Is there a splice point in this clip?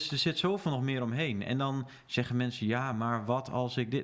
no; 0 cuts

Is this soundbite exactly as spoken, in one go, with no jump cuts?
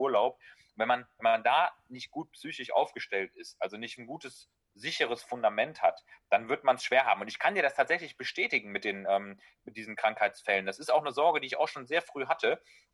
no; 1 cut; at 4.0 s

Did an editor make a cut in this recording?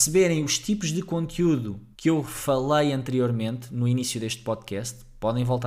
yes; 1 cut; at 1.9 s

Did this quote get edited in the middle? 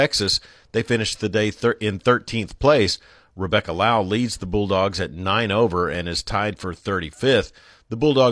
no; 0 cuts

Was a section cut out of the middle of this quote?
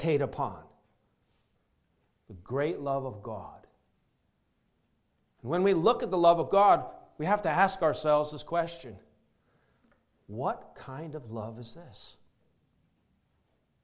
no; 0 cuts

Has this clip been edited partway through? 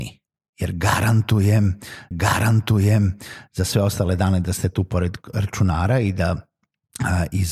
yes; 1 cut; at 2.1 s

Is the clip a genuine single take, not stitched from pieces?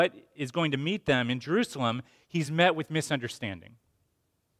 yes; 0 cuts

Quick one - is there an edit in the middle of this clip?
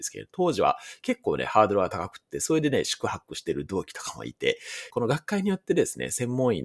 yes; 1 cut; at 4.9 s

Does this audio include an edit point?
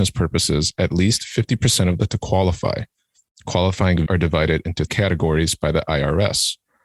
yes; 3 cuts; at 2.1 s, 4.1 s, 4.9 s

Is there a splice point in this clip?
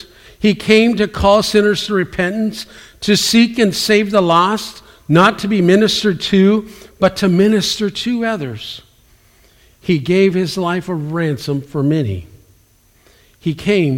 no; 0 cuts

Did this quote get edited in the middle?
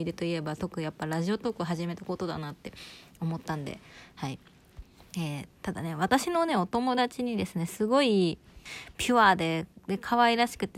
no; 0 cuts

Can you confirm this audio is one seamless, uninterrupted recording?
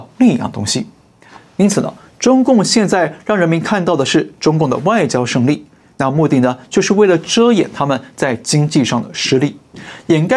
yes; 0 cuts

